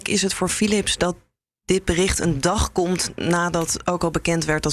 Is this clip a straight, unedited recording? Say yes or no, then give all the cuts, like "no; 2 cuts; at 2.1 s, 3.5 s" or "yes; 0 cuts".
yes; 0 cuts